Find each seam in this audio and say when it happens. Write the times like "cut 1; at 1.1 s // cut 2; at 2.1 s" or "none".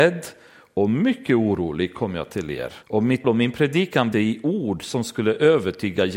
cut 1; at 2.8 s // cut 2; at 3.2 s // cut 3; at 4.1 s